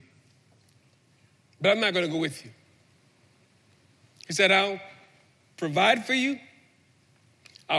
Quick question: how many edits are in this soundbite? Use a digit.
0